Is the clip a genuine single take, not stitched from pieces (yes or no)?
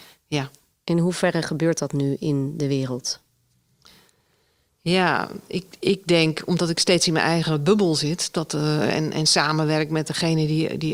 yes